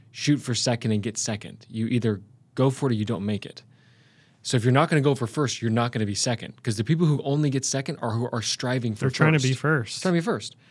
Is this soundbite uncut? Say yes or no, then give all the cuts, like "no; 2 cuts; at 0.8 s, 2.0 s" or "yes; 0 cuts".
yes; 0 cuts